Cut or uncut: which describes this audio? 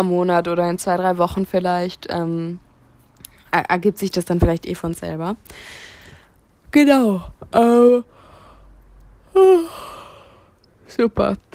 uncut